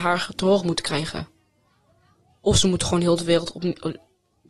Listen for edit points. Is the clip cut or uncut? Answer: uncut